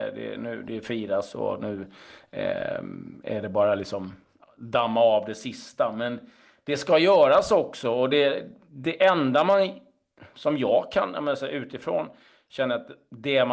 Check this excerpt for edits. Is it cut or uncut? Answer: uncut